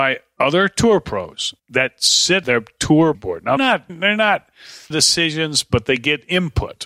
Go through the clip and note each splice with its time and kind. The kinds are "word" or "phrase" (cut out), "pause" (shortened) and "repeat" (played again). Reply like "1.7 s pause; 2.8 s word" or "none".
1.6 s pause; 2.4 s word; 3.1 s word; 3.6 s word; 3.9 s word; 4.9 s phrase